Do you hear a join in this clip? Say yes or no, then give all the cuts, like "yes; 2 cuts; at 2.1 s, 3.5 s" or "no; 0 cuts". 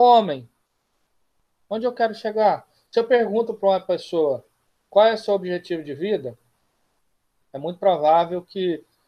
no; 0 cuts